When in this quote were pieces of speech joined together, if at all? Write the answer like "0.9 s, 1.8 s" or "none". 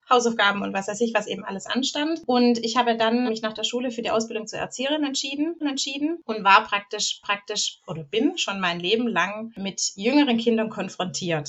3.3 s, 5.6 s, 7.2 s